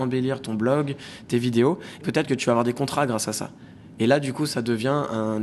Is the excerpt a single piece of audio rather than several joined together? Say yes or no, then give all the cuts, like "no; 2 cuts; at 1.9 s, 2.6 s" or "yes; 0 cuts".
no; 1 cut; at 2.0 s